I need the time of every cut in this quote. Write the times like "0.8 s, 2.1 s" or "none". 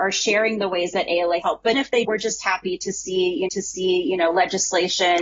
1.4 s, 1.7 s, 2.0 s, 3.5 s